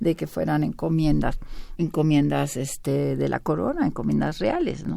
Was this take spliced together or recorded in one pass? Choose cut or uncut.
cut